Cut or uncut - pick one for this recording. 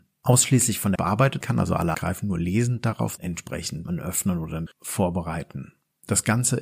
cut